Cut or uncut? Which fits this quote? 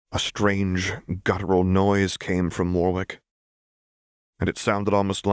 uncut